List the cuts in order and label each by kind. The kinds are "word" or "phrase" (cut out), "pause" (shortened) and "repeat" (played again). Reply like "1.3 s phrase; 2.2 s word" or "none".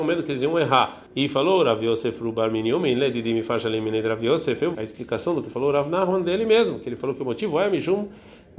1.1 s pause; 4.7 s word